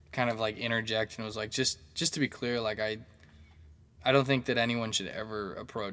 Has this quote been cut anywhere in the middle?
no; 0 cuts

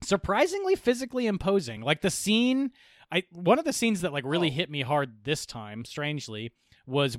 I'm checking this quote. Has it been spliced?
no; 0 cuts

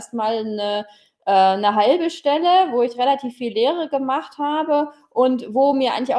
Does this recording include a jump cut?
no; 0 cuts

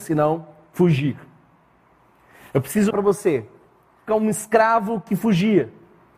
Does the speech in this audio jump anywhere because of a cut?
yes; 2 cuts; at 2.9 s, 4.1 s

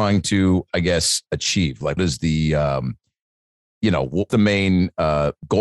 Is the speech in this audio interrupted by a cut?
yes; 3 cuts; at 1.3 s, 2.0 s, 4.3 s

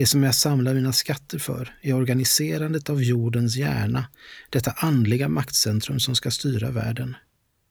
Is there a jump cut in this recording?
no; 0 cuts

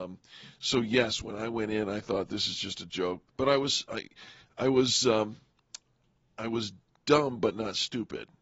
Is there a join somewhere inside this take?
yes; 1 cut; at 3.3 s

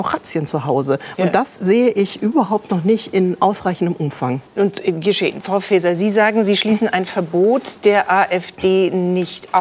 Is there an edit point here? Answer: yes; 1 cut; at 4.5 s

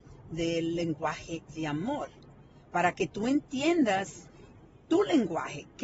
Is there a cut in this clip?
no; 0 cuts

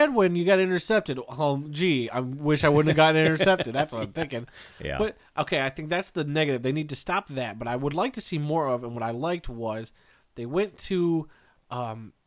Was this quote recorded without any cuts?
yes; 0 cuts

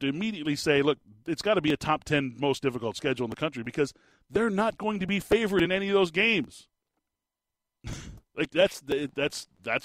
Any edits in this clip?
no; 0 cuts

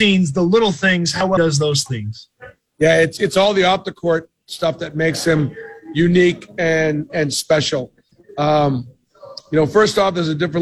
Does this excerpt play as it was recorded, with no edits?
no; 1 cut; at 1.4 s

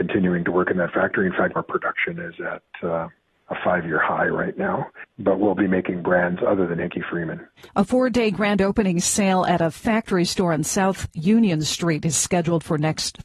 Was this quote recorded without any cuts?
no; 2 cuts; at 1.6 s, 7.7 s

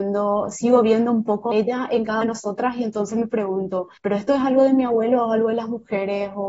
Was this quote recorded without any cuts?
no; 3 cuts; at 1.5 s, 2.2 s, 4.0 s

